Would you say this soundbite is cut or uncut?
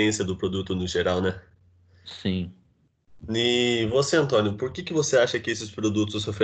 uncut